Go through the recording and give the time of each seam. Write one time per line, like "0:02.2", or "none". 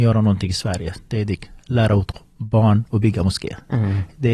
0:02.4